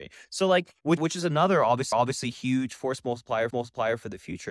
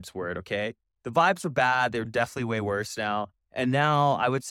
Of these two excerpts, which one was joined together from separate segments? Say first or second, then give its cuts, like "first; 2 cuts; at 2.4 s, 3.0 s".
first; 3 cuts; at 1.0 s, 1.9 s, 3.5 s